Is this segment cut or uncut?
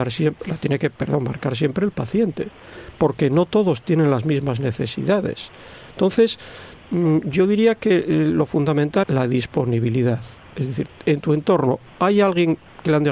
cut